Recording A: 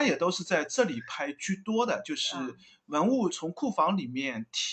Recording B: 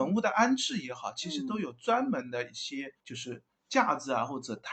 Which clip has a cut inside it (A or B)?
B